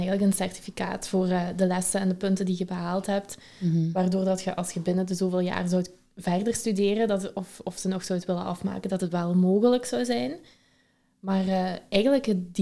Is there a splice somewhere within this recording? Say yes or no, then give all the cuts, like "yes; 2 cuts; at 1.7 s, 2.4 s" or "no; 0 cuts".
no; 0 cuts